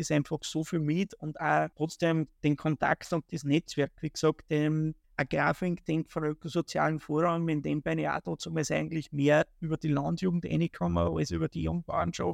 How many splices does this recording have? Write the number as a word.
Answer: two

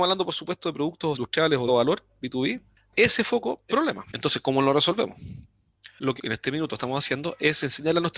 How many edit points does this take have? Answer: five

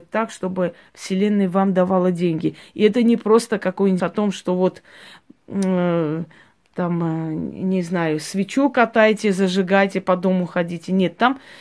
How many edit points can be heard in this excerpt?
one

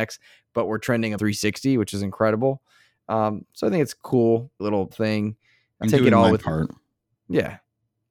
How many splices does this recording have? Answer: four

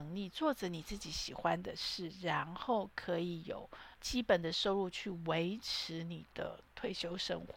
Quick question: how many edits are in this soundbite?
one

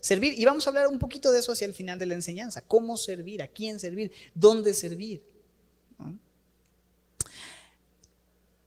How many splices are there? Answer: zero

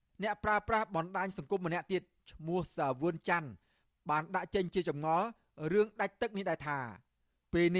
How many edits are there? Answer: zero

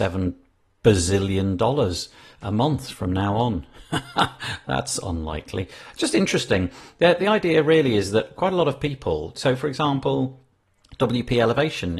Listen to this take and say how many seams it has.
zero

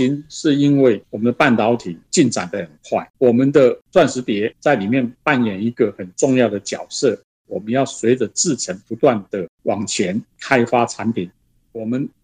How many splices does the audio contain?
one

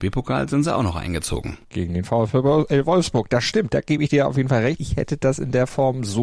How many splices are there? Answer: two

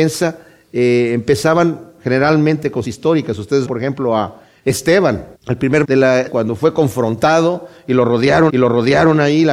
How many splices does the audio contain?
six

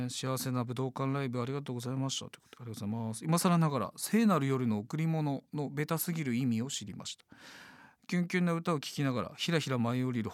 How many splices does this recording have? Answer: zero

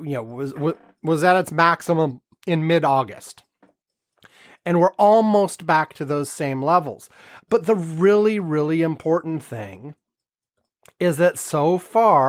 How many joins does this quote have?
zero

